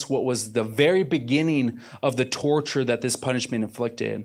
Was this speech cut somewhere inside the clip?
no; 0 cuts

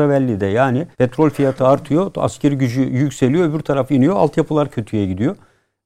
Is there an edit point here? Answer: yes; 1 cut; at 0.9 s

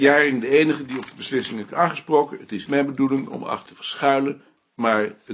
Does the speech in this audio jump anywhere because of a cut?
yes; 3 cuts; at 1.7 s, 2.7 s, 3.7 s

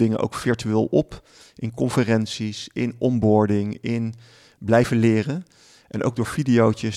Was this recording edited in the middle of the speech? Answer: no; 0 cuts

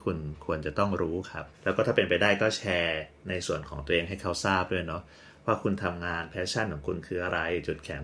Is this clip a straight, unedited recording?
no; 1 cut; at 1.5 s

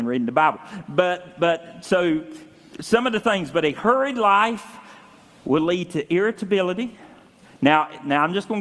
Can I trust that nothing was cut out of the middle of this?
yes; 0 cuts

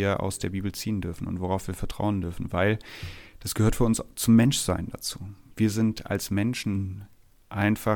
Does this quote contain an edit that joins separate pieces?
no; 0 cuts

